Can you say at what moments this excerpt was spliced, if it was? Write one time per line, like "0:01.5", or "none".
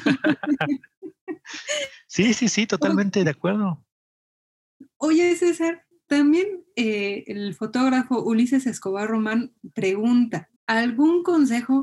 0:10.6